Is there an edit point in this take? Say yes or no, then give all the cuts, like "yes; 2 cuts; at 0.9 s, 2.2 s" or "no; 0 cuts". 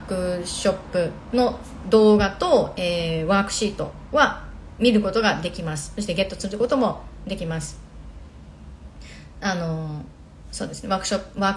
no; 0 cuts